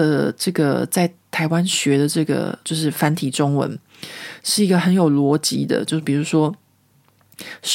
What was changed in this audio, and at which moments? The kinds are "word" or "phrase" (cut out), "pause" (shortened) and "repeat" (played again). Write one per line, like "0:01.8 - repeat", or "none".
0:02.6 - pause